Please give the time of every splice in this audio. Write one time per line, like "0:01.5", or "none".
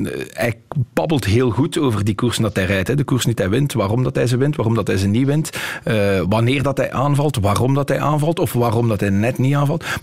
none

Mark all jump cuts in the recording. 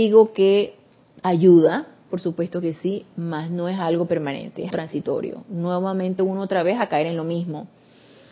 0:04.7
0:06.2

